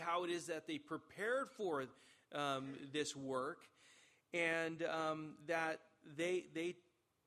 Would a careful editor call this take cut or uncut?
uncut